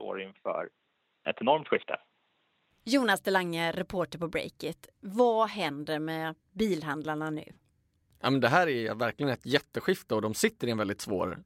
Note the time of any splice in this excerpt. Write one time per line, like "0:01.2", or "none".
none